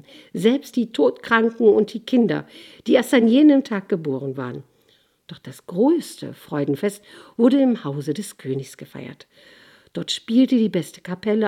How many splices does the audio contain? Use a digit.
0